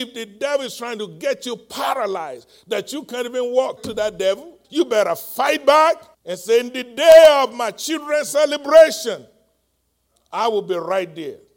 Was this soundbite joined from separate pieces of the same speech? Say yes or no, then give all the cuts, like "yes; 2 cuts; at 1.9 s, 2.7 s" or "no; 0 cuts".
yes; 3 cuts; at 3.8 s, 4.6 s, 6.1 s